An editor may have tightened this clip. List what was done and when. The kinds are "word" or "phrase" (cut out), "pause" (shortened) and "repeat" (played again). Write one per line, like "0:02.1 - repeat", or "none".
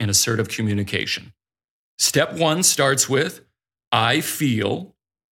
none